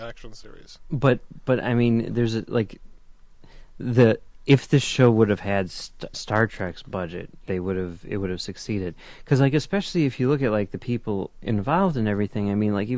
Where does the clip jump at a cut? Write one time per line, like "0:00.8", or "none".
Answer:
0:06.1
0:07.5